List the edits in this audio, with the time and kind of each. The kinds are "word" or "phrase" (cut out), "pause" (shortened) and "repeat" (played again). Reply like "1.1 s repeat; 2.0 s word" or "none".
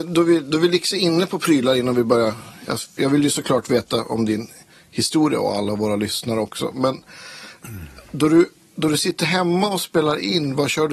none

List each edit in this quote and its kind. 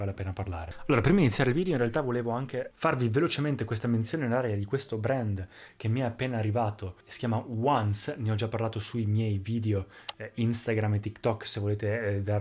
7.0 s pause

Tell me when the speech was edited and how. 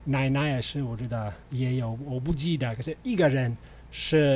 1.4 s pause

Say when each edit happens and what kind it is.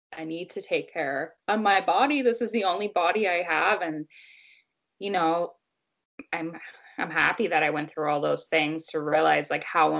1.4 s pause

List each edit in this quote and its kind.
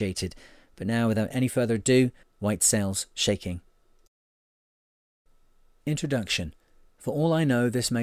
2.2 s pause; 6.9 s pause

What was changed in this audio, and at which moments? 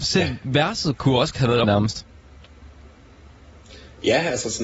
1.6 s word

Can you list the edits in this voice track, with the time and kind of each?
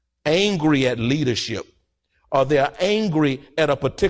none

